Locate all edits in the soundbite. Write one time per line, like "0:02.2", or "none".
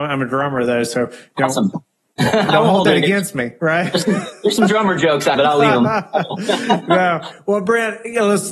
0:05.3